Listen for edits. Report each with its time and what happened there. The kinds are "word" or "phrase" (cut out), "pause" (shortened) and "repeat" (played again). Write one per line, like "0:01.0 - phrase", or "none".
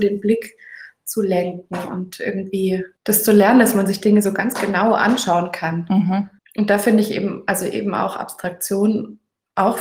0:03.0 - pause
0:06.4 - pause